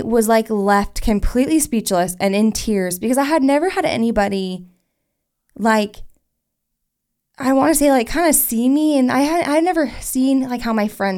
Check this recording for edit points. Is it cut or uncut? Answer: uncut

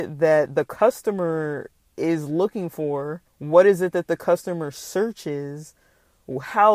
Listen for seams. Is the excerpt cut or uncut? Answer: cut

